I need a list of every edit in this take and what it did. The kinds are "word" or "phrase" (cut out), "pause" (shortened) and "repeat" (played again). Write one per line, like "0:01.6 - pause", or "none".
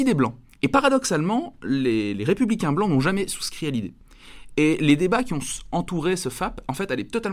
none